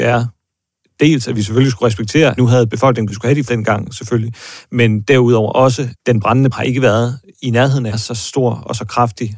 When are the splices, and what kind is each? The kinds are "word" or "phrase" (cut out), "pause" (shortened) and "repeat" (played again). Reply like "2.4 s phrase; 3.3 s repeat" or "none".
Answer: 2.4 s word; 3.1 s word; 3.5 s word; 5.9 s word; 6.5 s word; 7.9 s word